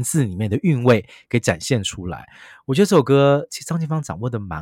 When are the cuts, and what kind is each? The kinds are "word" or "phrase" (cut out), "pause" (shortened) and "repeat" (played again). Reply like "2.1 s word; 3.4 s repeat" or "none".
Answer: 3.5 s word